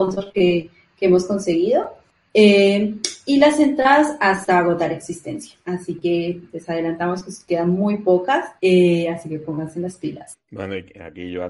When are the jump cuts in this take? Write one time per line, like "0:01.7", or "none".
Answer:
0:05.6
0:08.6